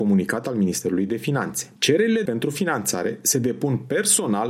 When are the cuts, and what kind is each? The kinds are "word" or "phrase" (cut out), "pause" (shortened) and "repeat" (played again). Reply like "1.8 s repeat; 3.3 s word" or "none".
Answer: 1.8 s pause; 2.3 s word